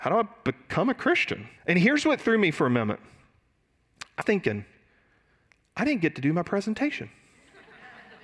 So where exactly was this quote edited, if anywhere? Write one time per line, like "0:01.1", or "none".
0:01.6
0:04.2